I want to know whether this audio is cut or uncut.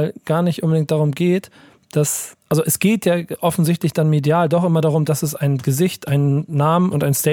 uncut